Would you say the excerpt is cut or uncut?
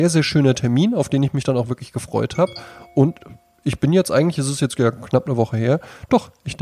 uncut